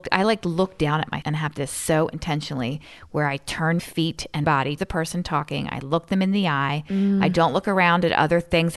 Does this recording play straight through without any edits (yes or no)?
no